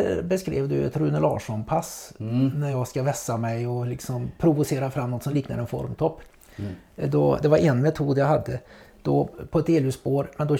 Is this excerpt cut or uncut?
uncut